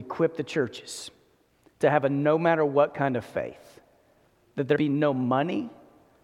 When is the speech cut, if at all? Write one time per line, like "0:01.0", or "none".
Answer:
0:01.5
0:04.8